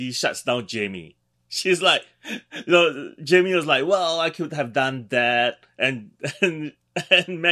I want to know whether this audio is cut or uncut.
cut